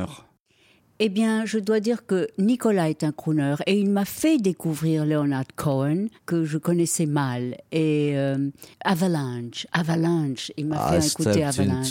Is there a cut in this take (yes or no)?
yes